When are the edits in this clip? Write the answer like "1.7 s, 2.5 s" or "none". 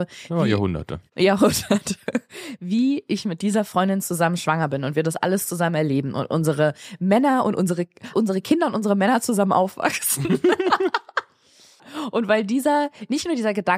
1.1 s, 8.1 s